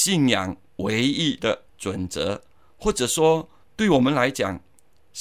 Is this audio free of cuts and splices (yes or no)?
no